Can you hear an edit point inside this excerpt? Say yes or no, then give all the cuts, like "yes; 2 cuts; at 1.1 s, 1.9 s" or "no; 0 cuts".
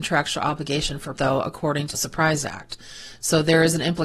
yes; 2 cuts; at 1.2 s, 1.9 s